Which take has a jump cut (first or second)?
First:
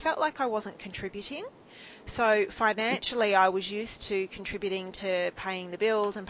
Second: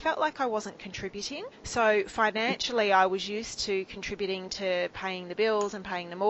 second